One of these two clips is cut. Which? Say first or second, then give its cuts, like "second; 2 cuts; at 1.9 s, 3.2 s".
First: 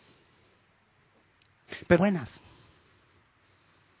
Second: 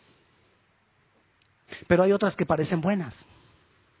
first; 1 cut; at 2.0 s